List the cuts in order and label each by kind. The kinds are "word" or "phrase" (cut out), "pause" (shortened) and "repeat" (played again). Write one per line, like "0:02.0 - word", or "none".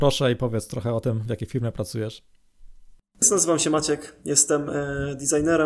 none